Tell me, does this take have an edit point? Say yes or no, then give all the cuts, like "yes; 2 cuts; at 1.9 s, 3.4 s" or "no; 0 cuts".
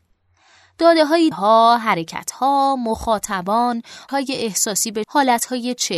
yes; 3 cuts; at 1.3 s, 4.1 s, 5.0 s